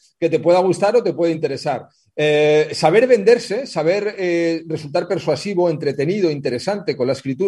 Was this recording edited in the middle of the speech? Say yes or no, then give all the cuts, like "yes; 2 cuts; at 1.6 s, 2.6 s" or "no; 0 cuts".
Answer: no; 0 cuts